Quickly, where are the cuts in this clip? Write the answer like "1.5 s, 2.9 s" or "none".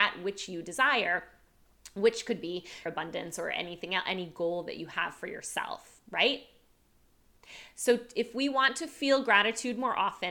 2.9 s